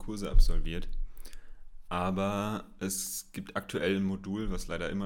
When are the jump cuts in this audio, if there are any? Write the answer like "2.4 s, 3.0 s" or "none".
none